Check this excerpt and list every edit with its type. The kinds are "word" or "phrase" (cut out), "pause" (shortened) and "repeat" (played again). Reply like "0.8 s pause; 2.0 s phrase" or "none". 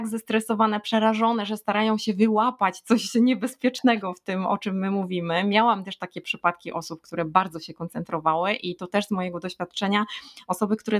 none